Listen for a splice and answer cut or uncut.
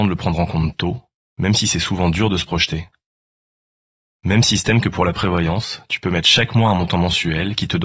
uncut